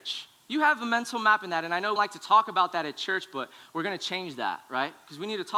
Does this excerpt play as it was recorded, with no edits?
no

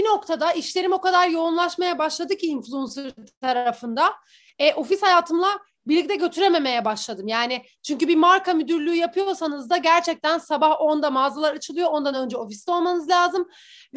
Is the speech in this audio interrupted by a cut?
no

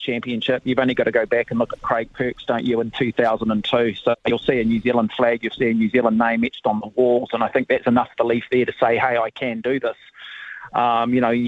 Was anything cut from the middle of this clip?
no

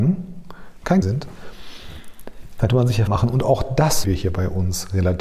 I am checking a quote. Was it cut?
yes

